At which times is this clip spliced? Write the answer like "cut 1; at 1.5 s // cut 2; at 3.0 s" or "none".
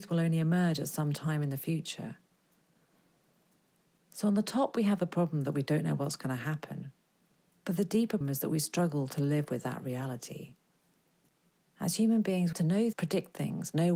cut 1; at 8.2 s // cut 2; at 12.5 s // cut 3; at 12.9 s